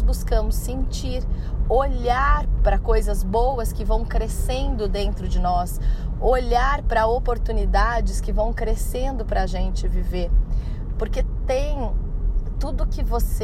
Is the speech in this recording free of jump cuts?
yes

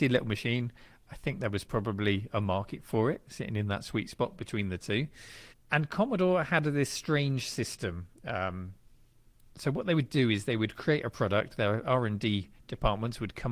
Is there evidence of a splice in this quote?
yes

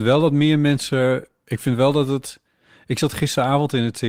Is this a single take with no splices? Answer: yes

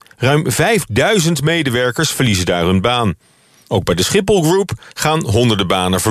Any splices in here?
no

